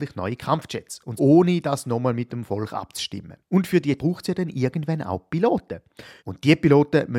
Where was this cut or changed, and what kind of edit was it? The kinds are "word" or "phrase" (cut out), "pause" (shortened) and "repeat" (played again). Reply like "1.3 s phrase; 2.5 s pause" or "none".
1.2 s word; 3.4 s pause; 4.0 s word; 6.2 s pause